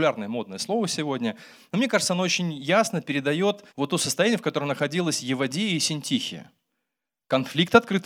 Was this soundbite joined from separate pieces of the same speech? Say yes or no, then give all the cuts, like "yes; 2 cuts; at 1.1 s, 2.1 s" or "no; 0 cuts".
yes; 1 cut; at 3.7 s